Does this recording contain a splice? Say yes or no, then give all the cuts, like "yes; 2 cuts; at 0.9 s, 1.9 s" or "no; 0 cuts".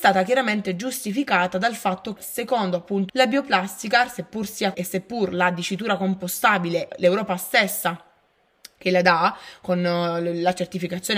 yes; 4 cuts; at 2.2 s, 3.1 s, 4.7 s, 6.9 s